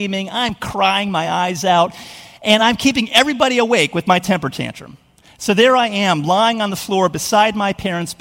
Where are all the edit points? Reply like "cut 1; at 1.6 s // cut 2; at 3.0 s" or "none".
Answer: none